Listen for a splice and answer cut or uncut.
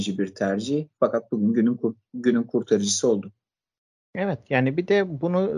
uncut